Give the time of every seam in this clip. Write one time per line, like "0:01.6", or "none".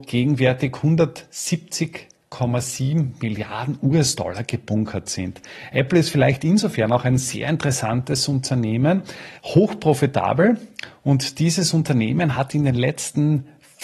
0:09.4